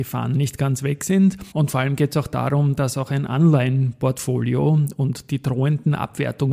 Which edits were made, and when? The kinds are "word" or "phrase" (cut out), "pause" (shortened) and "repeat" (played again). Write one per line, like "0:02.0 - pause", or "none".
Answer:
0:01.5 - pause